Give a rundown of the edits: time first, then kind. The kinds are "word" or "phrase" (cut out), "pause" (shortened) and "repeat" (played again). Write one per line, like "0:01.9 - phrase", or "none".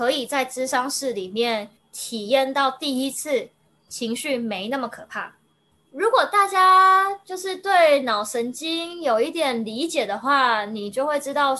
0:05.5 - pause

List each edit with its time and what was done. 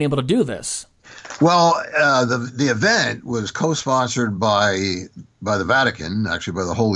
none

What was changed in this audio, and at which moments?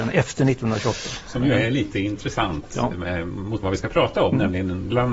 0:03.6 - phrase

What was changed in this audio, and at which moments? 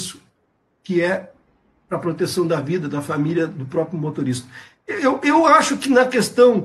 none

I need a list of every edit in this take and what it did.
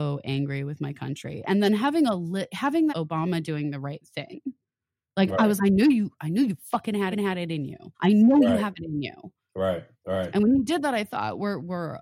0:02.9 - phrase
0:05.6 - word
0:07.1 - repeat
0:07.9 - pause
0:09.9 - pause

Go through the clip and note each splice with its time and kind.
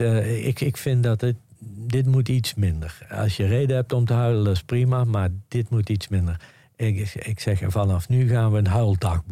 none

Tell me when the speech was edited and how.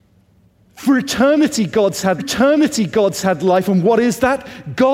0:02.2 - repeat

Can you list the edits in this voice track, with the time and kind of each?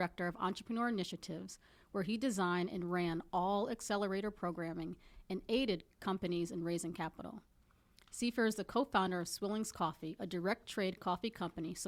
0:11.0 - word

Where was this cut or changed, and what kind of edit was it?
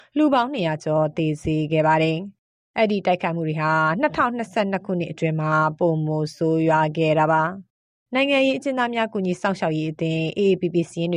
none

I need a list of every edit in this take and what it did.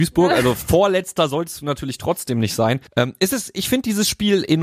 0:02.9 - pause

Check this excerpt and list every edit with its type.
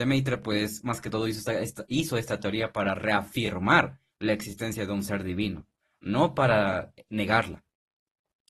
none

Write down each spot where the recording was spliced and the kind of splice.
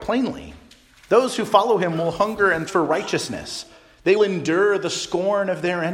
0:02.7 - word
0:04.2 - word

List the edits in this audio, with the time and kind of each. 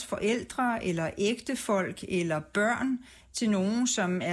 none

